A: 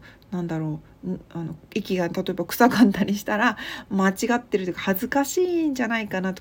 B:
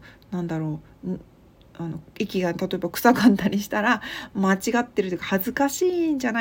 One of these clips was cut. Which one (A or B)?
A